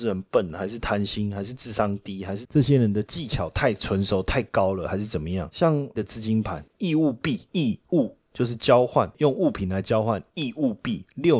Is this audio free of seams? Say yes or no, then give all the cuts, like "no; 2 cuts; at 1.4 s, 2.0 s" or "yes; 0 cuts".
no; 2 cuts; at 5.9 s, 6.7 s